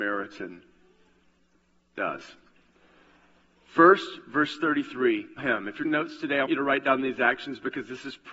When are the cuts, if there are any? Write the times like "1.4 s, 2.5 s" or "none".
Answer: 5.4 s, 5.8 s, 6.5 s